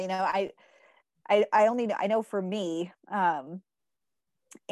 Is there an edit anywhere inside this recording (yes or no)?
no